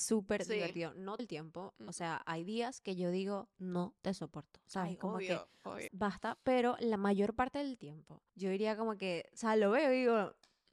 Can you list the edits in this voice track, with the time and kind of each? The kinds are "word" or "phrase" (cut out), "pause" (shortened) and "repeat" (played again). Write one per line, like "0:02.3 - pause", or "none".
0:01.2 - word
0:05.9 - word
0:08.3 - pause